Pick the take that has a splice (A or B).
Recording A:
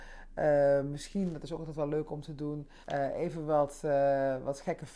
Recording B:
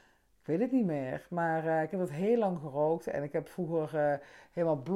A